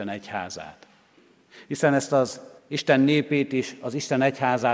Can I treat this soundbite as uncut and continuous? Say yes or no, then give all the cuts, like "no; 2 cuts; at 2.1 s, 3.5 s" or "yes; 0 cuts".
no; 1 cut; at 2.6 s